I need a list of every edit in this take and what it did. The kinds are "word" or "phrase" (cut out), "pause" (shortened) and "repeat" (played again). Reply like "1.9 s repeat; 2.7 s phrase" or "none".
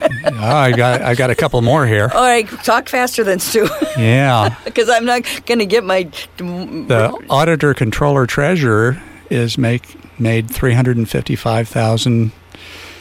none